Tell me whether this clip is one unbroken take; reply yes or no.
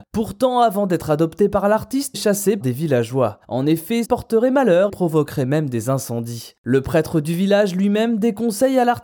no